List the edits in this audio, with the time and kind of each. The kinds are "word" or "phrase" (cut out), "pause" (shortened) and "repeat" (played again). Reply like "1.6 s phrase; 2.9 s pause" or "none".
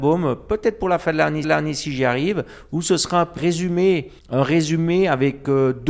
1.4 s repeat; 3.4 s word; 4.2 s pause

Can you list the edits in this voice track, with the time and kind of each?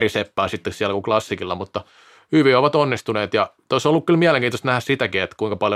none

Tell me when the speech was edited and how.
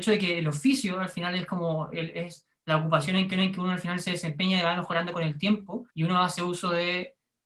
3.3 s repeat; 5.9 s pause

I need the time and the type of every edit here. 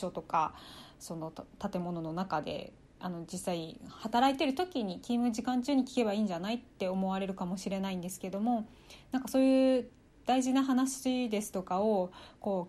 none

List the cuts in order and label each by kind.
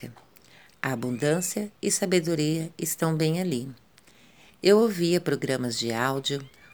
none

